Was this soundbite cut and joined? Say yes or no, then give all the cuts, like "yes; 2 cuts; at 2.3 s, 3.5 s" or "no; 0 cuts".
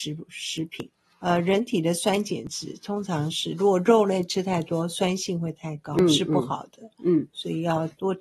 no; 0 cuts